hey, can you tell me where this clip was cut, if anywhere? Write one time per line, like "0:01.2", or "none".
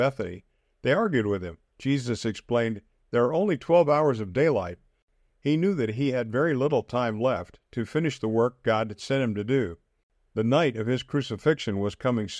0:01.7